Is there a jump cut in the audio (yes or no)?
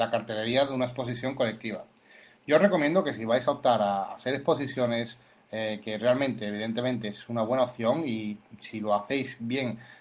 no